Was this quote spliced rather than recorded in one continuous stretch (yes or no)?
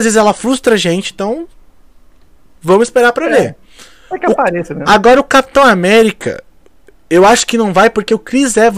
no